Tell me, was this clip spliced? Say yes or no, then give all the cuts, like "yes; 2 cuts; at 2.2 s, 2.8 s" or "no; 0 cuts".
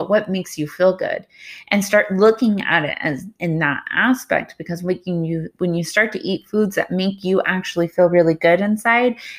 no; 0 cuts